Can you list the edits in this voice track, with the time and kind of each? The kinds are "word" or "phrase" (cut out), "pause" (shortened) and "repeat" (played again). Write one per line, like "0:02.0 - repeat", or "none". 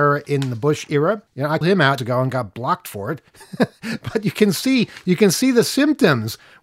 0:01.3 - pause
0:01.6 - word
0:02.0 - word
0:03.3 - pause